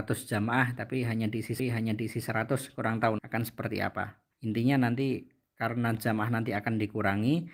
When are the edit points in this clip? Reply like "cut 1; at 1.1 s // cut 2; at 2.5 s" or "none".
cut 1; at 1.6 s // cut 2; at 3.2 s // cut 3; at 4.3 s // cut 4; at 6.0 s